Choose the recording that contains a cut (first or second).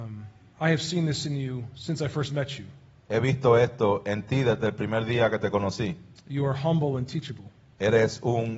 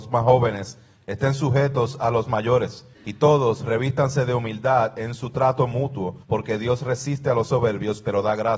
second